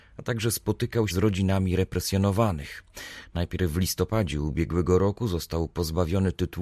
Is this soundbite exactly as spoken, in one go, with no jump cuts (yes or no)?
no